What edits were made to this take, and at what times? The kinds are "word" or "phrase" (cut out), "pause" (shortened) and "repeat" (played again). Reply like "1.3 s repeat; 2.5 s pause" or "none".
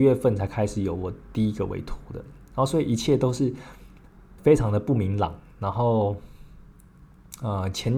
4.4 s word